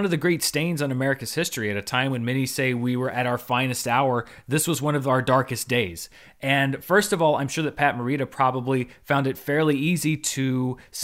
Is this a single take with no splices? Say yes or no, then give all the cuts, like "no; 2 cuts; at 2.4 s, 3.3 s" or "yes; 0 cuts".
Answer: yes; 0 cuts